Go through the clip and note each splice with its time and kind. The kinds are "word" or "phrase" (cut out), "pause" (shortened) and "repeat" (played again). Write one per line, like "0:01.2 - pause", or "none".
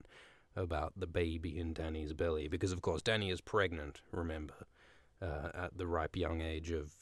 none